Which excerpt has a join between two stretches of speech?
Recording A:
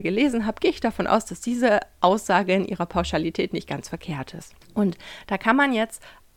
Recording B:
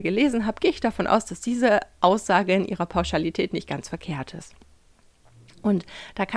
A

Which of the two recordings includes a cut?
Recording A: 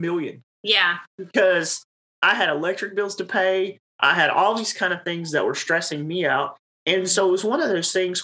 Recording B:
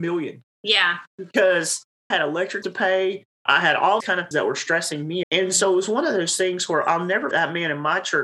B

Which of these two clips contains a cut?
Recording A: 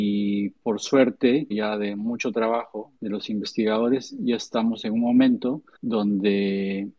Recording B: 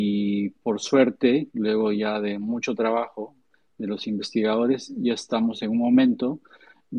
A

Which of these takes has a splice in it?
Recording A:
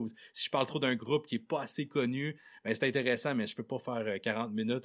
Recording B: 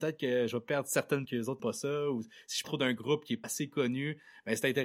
B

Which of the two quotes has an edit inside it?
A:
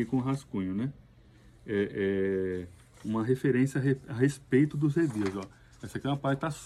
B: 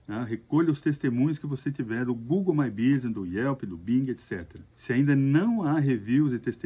B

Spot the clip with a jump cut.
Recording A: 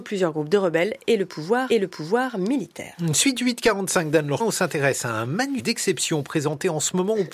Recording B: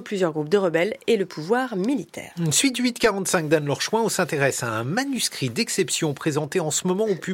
A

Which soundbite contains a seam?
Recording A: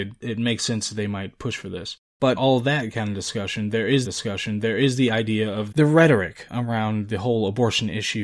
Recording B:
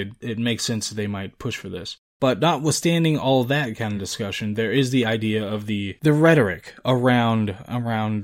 A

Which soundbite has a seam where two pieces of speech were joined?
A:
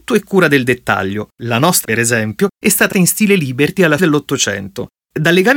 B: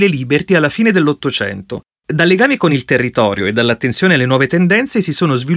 A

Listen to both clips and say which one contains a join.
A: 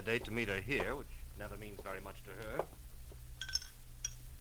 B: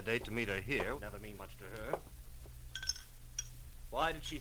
B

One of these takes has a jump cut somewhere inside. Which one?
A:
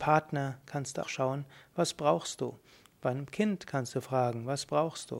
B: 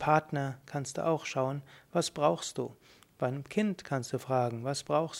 A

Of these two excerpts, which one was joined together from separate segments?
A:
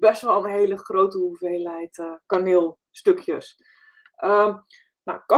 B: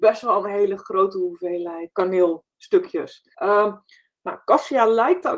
B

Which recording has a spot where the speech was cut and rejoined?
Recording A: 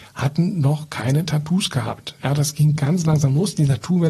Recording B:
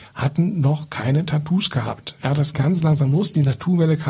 B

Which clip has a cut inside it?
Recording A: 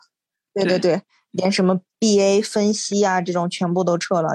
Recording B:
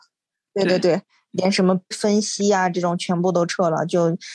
B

